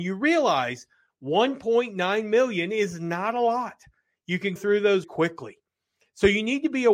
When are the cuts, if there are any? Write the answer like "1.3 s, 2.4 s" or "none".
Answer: 4.6 s, 5.0 s